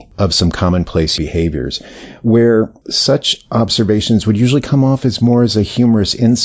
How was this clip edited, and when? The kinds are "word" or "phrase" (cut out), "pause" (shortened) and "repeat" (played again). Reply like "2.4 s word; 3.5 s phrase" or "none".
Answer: 1.2 s word